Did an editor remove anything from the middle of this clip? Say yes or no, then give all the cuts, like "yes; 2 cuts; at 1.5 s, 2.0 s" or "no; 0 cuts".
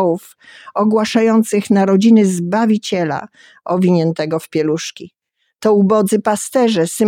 no; 0 cuts